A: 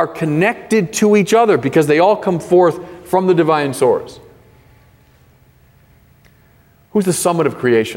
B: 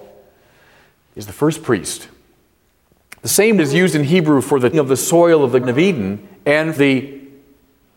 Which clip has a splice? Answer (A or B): B